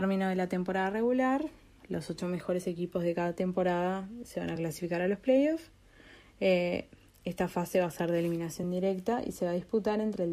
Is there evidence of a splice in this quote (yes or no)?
no